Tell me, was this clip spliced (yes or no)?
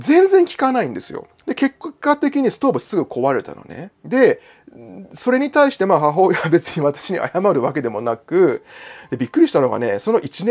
yes